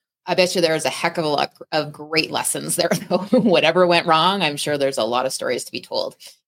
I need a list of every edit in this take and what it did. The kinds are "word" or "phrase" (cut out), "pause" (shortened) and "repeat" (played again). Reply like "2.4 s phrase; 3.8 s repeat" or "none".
none